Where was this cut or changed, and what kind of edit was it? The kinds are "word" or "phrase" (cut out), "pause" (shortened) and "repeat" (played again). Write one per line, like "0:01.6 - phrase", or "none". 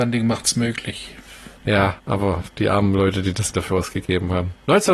0:02.5 - word
0:03.5 - word